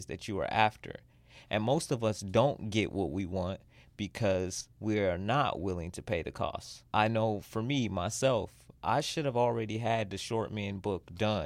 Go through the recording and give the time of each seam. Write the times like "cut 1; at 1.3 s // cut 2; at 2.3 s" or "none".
cut 1; at 4.7 s // cut 2; at 6.9 s // cut 3; at 8.8 s